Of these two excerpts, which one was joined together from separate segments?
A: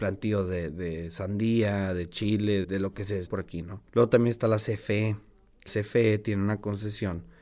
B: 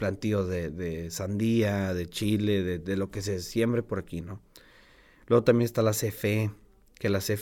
A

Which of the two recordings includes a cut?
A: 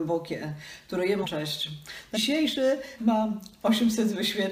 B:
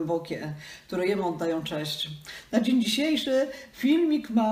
A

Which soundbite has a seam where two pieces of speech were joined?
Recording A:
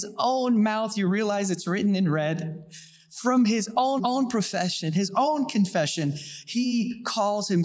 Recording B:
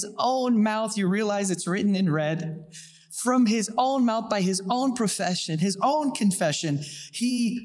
A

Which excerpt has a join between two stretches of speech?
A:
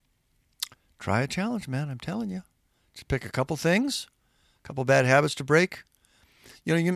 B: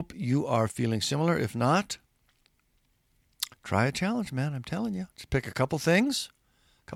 B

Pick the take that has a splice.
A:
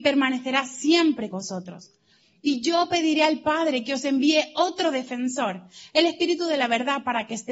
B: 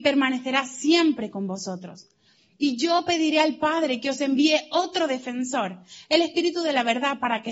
A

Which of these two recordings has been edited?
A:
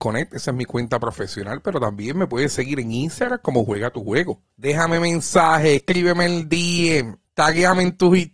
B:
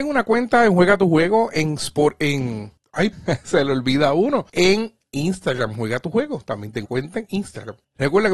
B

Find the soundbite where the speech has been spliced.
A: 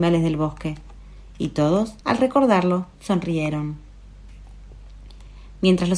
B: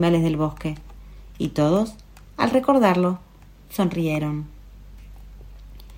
A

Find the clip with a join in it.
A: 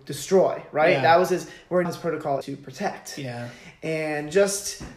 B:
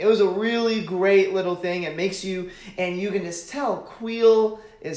A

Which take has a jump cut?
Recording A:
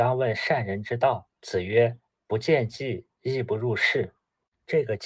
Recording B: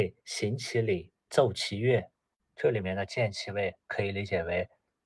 A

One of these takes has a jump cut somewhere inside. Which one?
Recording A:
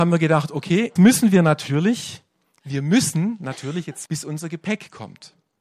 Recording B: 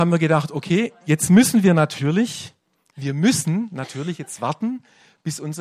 A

